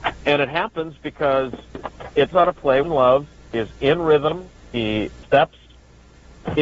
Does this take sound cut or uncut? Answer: cut